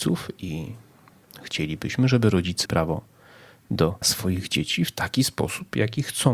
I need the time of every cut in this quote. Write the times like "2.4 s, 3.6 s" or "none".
2.7 s, 4.0 s